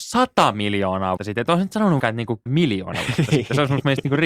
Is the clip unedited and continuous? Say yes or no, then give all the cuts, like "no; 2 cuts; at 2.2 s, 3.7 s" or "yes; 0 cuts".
no; 3 cuts; at 1.2 s, 2.0 s, 2.5 s